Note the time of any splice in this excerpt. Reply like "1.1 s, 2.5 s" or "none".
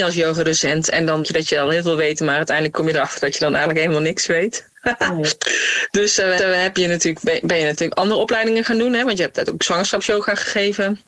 1.2 s, 6.4 s